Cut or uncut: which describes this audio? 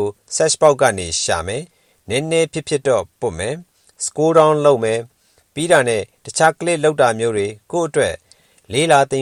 uncut